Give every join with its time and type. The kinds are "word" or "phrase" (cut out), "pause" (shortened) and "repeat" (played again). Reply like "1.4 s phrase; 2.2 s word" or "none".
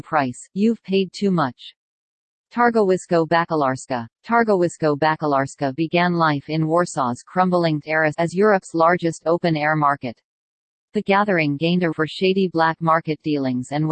7.8 s word; 8.1 s word; 11.9 s word